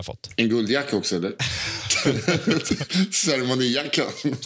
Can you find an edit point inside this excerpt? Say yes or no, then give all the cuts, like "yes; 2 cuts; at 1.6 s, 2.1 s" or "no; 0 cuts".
no; 0 cuts